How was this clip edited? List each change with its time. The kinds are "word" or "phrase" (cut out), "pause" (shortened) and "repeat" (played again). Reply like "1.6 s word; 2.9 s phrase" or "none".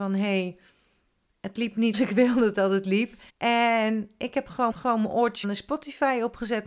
1.9 s word; 3.3 s pause; 4.7 s repeat; 5.4 s word